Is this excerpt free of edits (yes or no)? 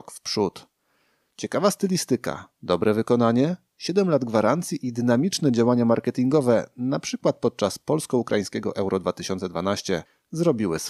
yes